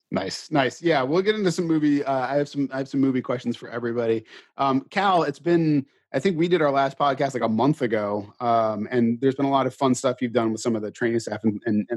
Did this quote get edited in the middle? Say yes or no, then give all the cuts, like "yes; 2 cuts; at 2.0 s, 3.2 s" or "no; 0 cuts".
no; 0 cuts